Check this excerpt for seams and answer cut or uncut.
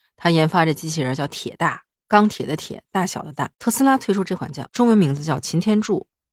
cut